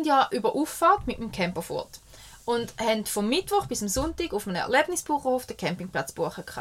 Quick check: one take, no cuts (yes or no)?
yes